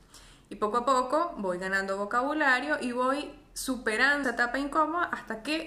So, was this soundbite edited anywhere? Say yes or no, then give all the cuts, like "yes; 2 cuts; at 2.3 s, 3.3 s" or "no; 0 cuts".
yes; 1 cut; at 4.2 s